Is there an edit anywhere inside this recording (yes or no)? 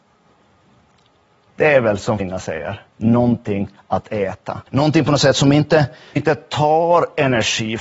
yes